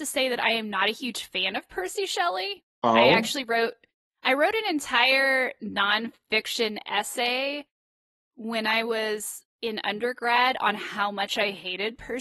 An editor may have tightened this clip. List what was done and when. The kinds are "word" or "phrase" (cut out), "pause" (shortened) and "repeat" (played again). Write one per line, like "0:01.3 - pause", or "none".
0:02.7 - pause
0:09.5 - pause